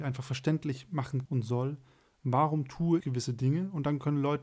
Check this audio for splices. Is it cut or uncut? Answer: cut